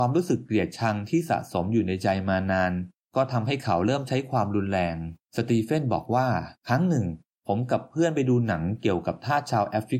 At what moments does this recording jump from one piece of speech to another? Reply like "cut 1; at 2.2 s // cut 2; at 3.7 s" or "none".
cut 1; at 5.2 s // cut 2; at 6.6 s